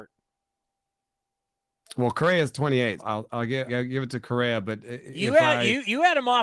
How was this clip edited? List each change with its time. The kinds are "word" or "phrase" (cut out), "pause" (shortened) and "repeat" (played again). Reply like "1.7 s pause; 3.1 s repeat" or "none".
3.0 s word; 3.7 s word